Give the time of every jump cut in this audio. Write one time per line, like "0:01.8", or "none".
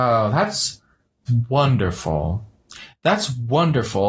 0:01.3